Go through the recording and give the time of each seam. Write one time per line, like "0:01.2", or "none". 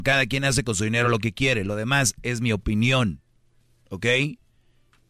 none

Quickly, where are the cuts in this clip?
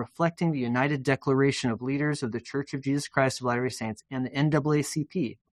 none

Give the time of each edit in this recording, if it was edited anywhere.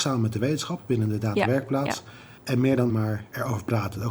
0:02.4
0:02.9

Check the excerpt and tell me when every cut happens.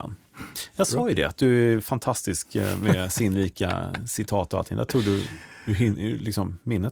none

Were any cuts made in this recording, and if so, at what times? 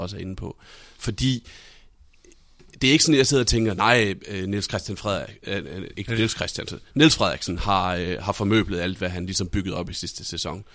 none

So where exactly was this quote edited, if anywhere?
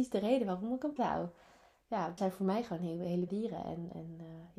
0:01.0
0:02.2
0:03.3

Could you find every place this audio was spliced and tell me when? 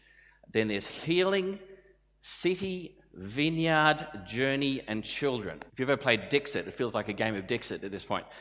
0:05.7

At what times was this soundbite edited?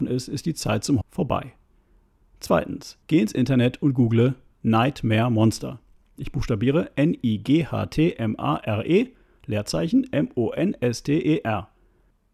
0:01.0
0:03.0

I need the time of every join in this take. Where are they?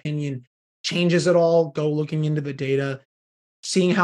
none

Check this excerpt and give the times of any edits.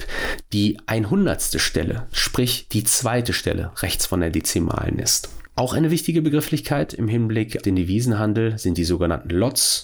0:07.6

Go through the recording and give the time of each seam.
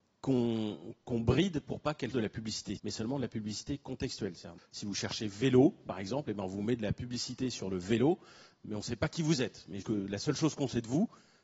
0:02.1
0:02.8
0:04.6
0:09.8

